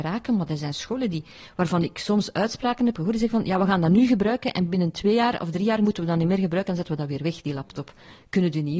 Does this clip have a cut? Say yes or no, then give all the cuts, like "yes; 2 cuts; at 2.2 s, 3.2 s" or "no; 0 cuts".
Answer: no; 0 cuts